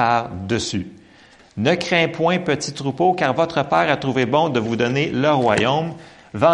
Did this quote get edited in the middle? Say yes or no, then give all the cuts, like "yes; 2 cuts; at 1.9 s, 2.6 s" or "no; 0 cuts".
no; 0 cuts